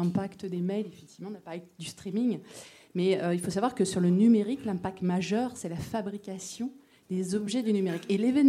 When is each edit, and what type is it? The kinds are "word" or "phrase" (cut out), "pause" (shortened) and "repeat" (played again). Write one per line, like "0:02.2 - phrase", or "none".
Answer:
none